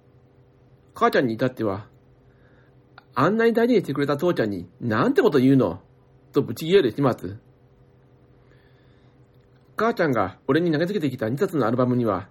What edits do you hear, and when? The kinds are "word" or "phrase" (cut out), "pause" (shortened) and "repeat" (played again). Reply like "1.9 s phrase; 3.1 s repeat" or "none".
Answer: 10.4 s pause